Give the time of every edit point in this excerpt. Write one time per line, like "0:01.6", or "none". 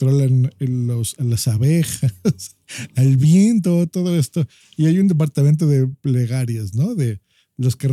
none